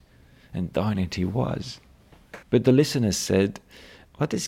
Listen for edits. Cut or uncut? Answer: cut